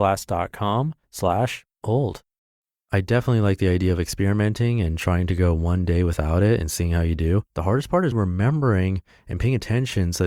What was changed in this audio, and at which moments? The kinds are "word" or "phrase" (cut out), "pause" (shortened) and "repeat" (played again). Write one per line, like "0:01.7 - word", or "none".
0:01.0 - pause
0:02.4 - pause
0:07.5 - pause
0:08.1 - word

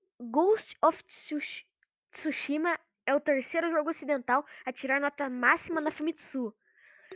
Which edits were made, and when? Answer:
none

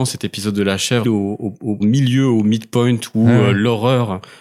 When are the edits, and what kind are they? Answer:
0:01.0 - phrase
0:01.8 - word

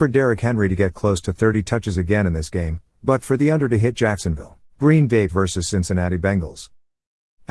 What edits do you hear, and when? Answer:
0:04.7 - pause
0:05.3 - word

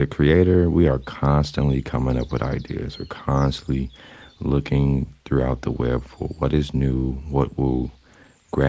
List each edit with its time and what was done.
none

